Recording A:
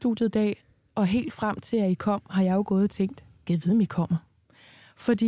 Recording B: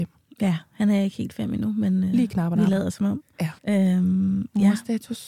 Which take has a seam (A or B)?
B